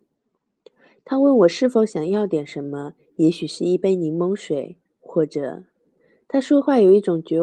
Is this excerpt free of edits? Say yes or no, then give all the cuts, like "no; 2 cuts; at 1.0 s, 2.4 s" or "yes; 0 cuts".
yes; 0 cuts